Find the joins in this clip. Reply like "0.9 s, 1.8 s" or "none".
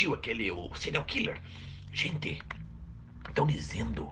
none